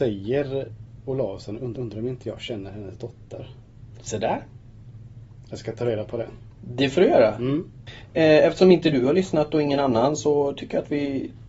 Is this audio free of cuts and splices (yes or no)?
no